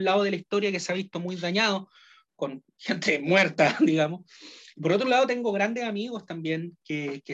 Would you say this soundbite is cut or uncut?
uncut